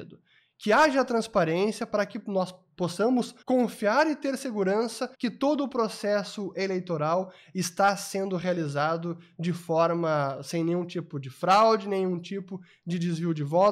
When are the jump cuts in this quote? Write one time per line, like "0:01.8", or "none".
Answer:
0:03.4
0:05.1